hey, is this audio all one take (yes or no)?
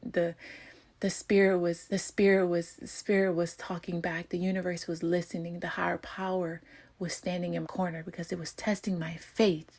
no